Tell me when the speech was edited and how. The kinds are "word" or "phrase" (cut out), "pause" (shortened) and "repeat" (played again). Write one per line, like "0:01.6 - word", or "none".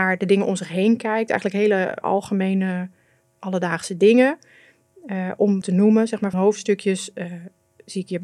0:02.0 - word
0:05.6 - phrase
0:06.3 - word